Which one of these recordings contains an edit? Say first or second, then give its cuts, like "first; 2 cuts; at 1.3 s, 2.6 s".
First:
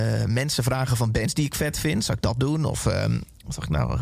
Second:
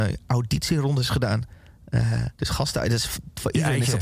second; 1 cut; at 2.3 s